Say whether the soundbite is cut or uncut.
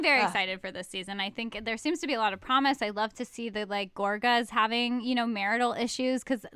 uncut